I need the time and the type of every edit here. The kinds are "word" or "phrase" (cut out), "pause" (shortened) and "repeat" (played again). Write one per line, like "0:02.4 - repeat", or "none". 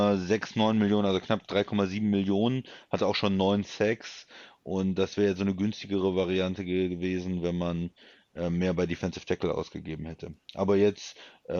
none